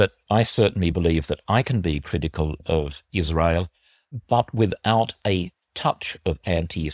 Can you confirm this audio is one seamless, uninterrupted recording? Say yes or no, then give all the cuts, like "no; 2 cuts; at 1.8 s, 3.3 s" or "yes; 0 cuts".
yes; 0 cuts